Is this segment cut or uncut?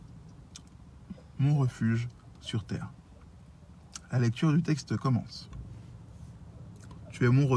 uncut